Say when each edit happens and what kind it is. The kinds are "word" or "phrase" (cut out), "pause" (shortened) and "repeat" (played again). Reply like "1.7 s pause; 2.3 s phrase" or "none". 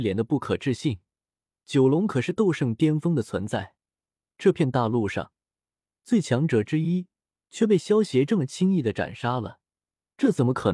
none